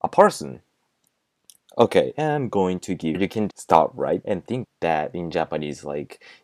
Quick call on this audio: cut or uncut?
cut